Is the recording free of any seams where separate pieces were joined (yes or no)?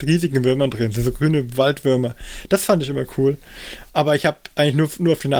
yes